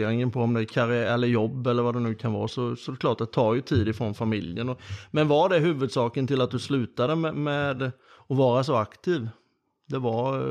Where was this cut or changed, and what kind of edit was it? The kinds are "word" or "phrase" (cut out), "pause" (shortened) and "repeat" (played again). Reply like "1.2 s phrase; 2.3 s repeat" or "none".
none

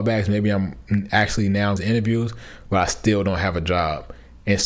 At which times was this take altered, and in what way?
1.8 s word

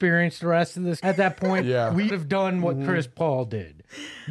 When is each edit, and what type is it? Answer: 1.0 s word; 2.1 s phrase

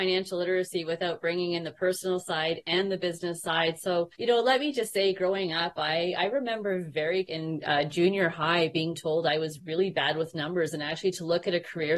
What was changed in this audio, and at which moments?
4.1 s pause; 7.3 s word

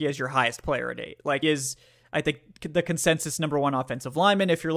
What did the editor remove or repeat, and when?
1.4 s word

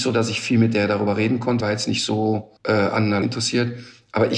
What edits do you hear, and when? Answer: 1.6 s word; 2.6 s pause; 3.2 s word

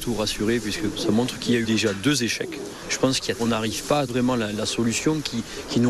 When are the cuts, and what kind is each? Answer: 1.6 s word; 3.4 s phrase; 4.1 s word

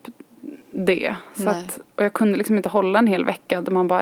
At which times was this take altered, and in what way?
1.9 s pause

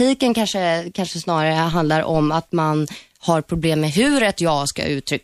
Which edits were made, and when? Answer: none

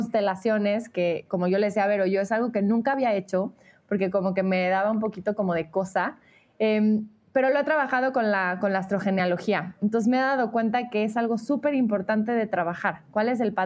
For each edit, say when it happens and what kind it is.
none

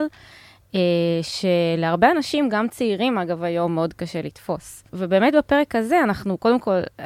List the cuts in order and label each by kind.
4.9 s pause

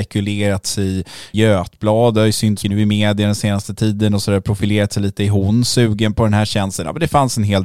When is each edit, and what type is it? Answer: 1.3 s word; 2.6 s word

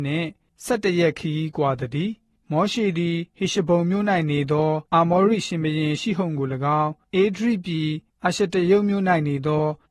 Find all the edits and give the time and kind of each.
3.3 s pause; 4.9 s pause

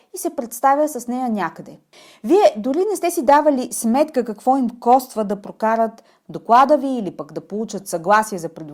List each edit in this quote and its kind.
none

